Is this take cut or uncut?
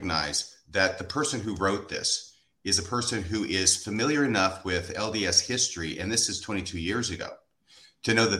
uncut